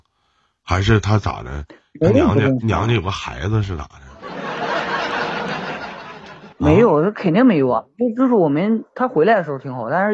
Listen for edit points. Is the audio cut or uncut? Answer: cut